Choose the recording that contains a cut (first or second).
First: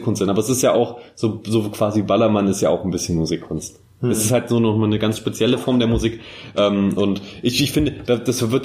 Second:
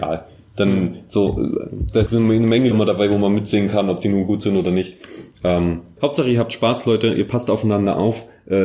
second